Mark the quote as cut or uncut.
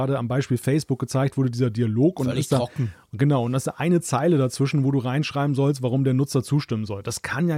uncut